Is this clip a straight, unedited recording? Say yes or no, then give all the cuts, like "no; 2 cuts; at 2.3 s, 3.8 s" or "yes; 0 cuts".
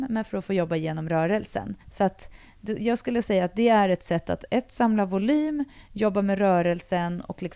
no; 1 cut; at 1.8 s